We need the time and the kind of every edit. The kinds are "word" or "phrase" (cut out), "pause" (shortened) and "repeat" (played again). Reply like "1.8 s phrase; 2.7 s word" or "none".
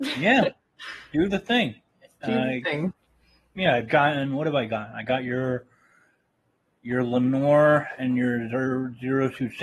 none